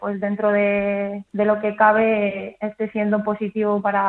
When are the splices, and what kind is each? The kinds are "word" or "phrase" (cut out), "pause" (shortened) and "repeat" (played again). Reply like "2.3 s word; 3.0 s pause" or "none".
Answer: 1.3 s pause